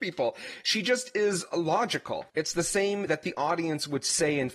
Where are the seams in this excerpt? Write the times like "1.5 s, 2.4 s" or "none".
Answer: 2.3 s, 3.1 s